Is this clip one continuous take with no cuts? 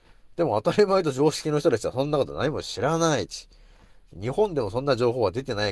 yes; 0 cuts

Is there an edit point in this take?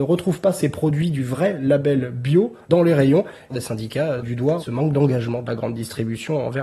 yes; 1 cut; at 4.2 s

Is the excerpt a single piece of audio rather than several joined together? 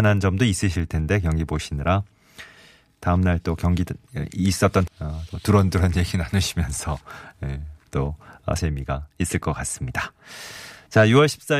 no; 2 cuts; at 4.9 s, 8.6 s

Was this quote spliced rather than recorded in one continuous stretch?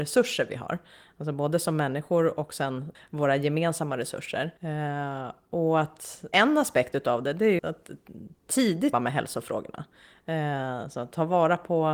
yes; 5 cuts; at 2.9 s, 4.6 s, 6.3 s, 7.6 s, 8.9 s

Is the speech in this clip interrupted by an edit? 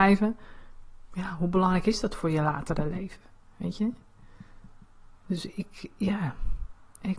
no; 0 cuts

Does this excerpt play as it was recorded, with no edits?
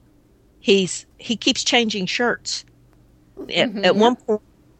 no; 2 cuts; at 1.1 s, 3.5 s

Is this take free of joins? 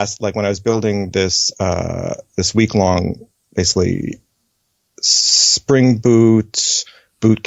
yes; 0 cuts

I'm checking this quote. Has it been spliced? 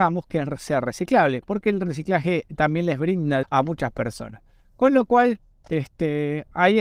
yes; 1 cut; at 3.4 s

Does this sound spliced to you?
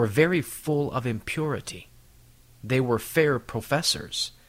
no; 0 cuts

